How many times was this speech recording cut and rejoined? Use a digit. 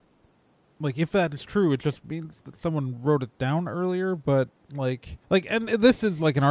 1